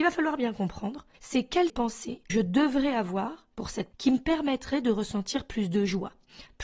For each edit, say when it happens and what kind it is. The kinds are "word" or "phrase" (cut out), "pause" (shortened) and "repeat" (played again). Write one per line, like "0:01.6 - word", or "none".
0:01.1 - pause
0:01.7 - phrase
0:02.3 - word
0:03.9 - word